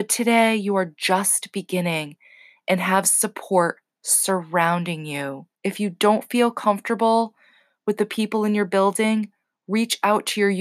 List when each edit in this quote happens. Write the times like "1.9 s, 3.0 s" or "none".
5.5 s